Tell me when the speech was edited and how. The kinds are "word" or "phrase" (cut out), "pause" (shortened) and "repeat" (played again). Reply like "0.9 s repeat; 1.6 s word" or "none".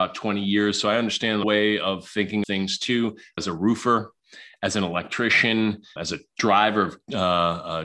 1.4 s phrase; 2.4 s word; 3.4 s phrase; 6.0 s word